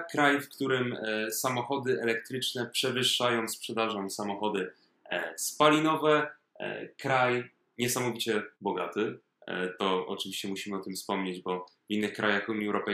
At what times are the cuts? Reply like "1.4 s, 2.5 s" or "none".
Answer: 8.5 s